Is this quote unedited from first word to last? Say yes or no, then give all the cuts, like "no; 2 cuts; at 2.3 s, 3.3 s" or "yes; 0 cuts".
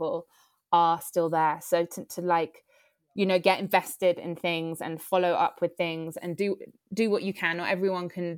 yes; 0 cuts